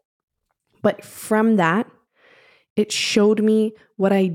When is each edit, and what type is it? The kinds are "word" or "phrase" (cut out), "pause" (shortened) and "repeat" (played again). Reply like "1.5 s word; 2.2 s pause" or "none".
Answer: none